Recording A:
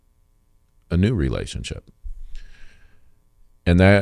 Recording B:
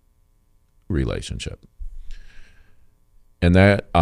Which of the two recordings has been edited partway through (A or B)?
B